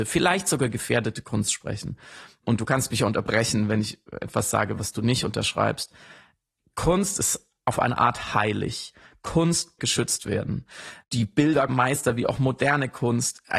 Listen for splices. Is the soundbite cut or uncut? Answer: cut